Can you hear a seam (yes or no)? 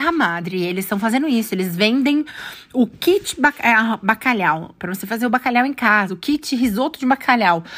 no